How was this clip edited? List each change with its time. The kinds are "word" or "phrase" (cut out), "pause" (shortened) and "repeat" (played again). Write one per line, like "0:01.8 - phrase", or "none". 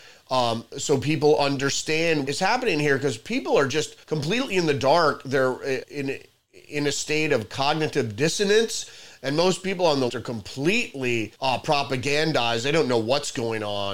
0:02.3 - word
0:04.0 - pause
0:05.8 - word
0:10.1 - word
0:11.3 - pause